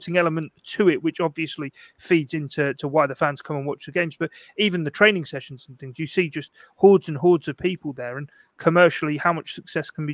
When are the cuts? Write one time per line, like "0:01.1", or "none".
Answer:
none